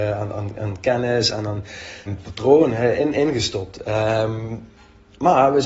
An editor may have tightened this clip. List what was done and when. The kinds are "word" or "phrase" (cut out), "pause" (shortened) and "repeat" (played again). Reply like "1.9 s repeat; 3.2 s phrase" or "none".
2.1 s word

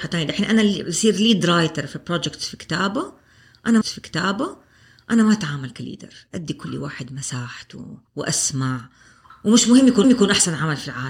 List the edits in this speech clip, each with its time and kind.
3.8 s repeat; 8.1 s pause; 10.0 s repeat

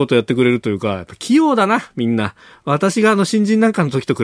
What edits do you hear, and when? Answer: none

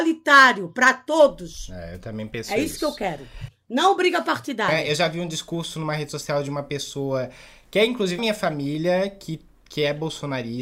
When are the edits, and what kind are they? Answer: 8.2 s word

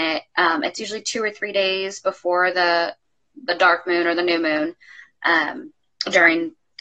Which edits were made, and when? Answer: none

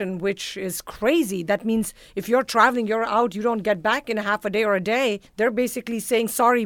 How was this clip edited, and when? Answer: 5.3 s pause

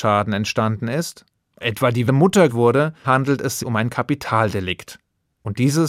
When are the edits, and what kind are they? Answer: 1.6 s word; 2.1 s word; 2.5 s word; 3.0 s word; 3.6 s word

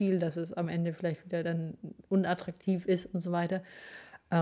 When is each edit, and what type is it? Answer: none

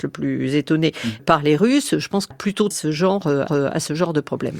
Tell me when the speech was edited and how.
1.2 s word; 2.3 s word; 2.7 s phrase; 3.5 s repeat

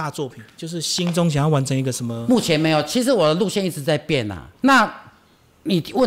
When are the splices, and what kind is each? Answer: 4.6 s pause

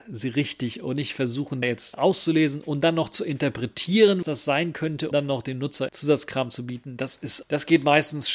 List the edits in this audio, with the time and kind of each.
1.6 s word; 1.9 s word; 4.2 s word; 5.1 s word; 5.9 s word; 7.4 s word

